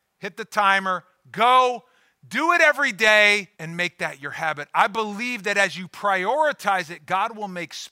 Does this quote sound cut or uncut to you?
cut